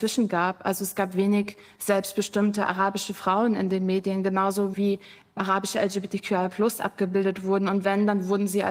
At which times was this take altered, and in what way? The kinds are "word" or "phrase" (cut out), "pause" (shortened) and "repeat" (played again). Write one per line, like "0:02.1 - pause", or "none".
0:04.7 - word